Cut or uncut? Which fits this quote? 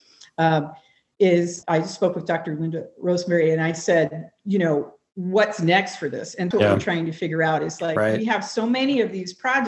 cut